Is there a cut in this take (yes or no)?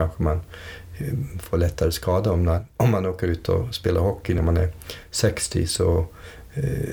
no